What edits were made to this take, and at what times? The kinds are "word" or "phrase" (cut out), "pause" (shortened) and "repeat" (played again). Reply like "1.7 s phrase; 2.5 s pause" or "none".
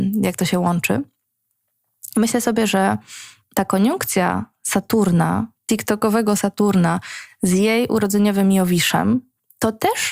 none